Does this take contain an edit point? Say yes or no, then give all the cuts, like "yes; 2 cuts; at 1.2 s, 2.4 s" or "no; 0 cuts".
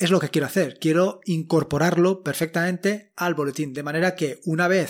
no; 0 cuts